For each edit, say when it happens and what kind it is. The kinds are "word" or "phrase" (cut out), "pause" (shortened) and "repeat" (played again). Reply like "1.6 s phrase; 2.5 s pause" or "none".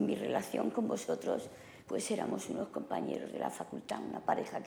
1.8 s pause